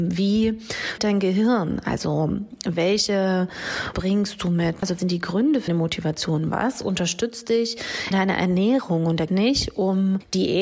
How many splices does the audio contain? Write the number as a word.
six